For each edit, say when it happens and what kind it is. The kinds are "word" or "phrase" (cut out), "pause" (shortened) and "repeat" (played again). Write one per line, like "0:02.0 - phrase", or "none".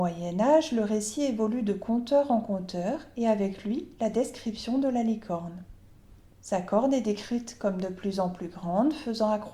0:06.2 - pause